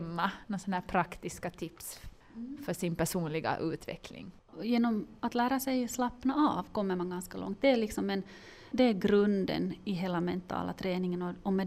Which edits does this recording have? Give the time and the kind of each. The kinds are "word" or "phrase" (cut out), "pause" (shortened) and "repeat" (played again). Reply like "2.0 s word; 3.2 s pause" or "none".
8.7 s word